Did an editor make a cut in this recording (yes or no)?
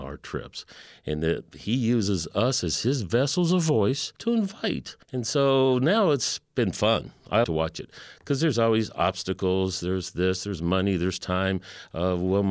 yes